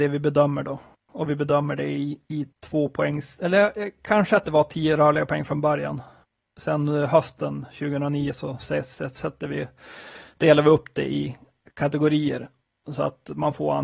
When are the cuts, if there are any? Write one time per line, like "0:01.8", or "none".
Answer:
0:02.5

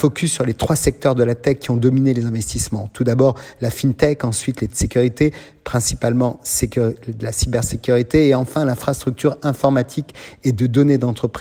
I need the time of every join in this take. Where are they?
0:04.7

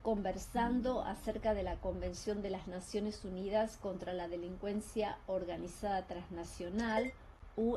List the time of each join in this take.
none

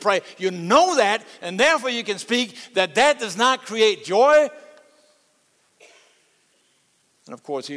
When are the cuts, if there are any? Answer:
none

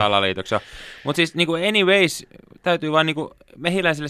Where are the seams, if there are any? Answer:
none

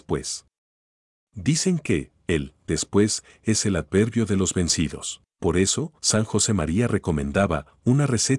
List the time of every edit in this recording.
0:05.3
0:06.0

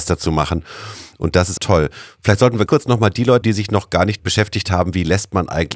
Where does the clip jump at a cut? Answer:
0:01.6
0:02.7
0:03.4
0:04.2

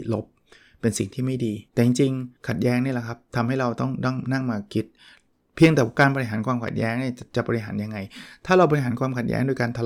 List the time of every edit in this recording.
0:01.7
0:02.4

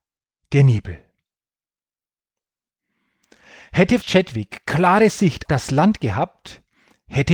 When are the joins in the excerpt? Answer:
0:04.0
0:05.5

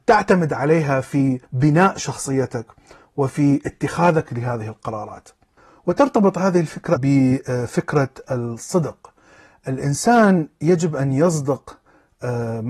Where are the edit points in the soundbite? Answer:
0:01.4
0:07.0

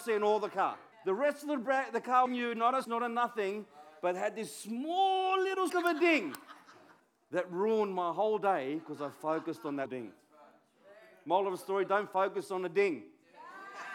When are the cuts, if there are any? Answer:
0:00.9
0:02.3
0:02.8
0:05.7
0:07.0
0:09.9

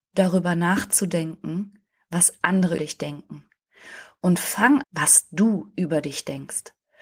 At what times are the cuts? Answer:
0:02.8
0:04.8

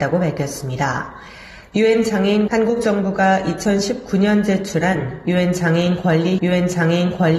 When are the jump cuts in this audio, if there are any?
0:02.5
0:06.4

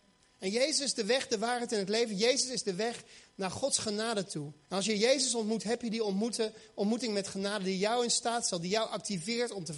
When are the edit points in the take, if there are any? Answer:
0:04.6

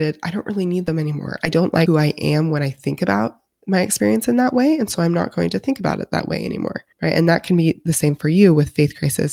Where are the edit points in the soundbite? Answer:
0:06.9

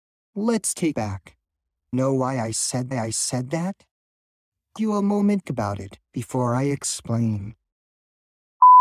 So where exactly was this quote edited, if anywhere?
0:00.9
0:01.9
0:02.9
0:04.8
0:05.4
0:06.0

